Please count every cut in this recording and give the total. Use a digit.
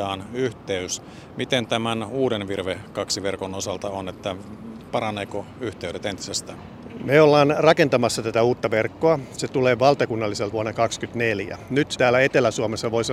3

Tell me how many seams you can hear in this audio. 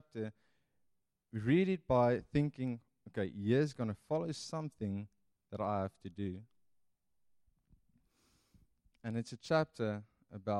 0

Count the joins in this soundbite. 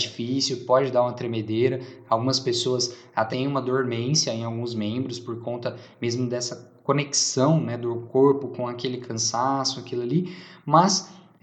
1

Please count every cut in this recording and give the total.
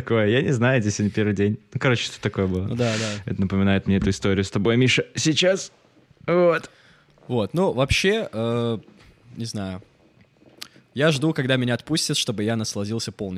0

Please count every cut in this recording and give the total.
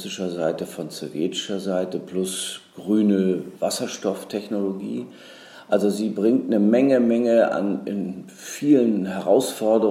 0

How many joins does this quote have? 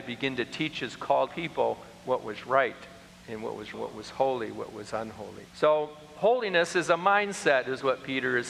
4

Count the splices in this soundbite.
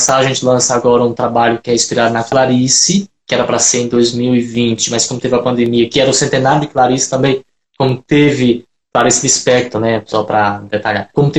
0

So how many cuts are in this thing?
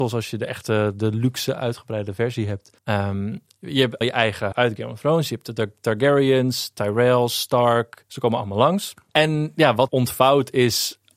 4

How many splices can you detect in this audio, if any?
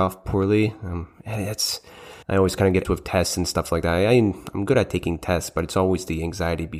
2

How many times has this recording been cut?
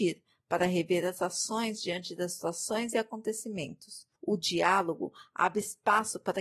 1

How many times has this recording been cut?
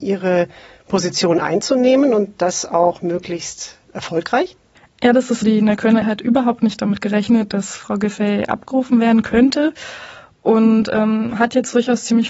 2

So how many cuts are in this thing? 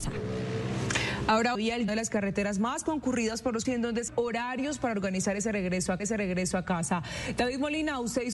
5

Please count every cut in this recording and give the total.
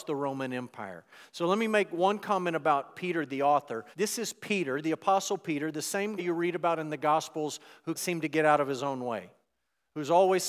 3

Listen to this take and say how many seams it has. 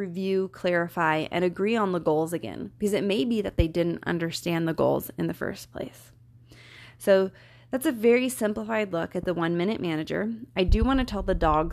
0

